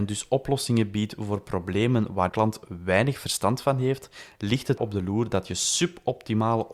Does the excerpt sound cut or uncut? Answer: cut